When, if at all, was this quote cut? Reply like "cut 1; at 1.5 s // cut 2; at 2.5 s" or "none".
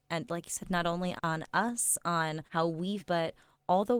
cut 1; at 1.2 s // cut 2; at 2.5 s // cut 3; at 3.0 s